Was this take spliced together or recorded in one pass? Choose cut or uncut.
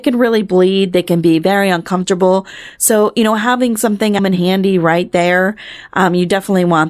cut